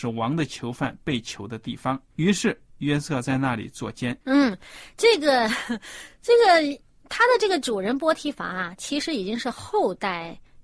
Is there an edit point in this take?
yes; 2 cuts; at 2.1 s, 4.2 s

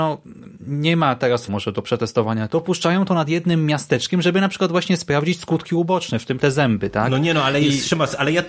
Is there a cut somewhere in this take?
yes; 3 cuts; at 1.5 s, 2.5 s, 6.4 s

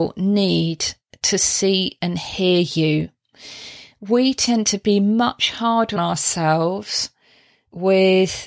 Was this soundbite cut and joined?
yes; 1 cut; at 6.0 s

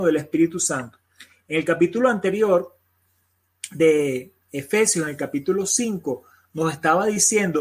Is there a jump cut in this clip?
no; 0 cuts

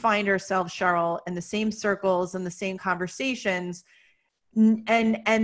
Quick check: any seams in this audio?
no; 0 cuts

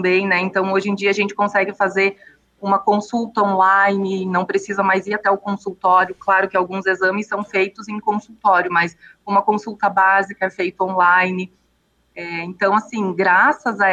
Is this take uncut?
yes; 0 cuts

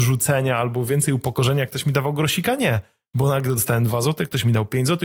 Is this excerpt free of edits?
yes; 0 cuts

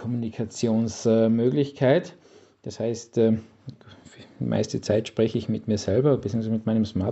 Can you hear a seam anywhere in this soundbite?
no; 0 cuts

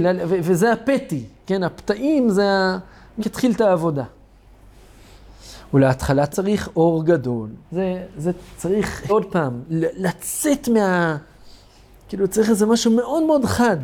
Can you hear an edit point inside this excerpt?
yes; 4 cuts; at 3.2 s, 6.3 s, 7.6 s, 9.1 s

